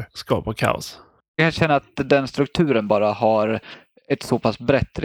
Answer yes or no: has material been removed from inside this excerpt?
no